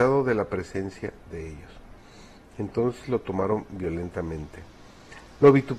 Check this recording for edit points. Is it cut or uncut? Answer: uncut